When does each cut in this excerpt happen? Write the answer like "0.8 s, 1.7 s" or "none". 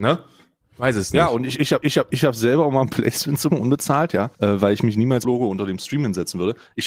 1.8 s, 3.5 s, 4.3 s, 5.2 s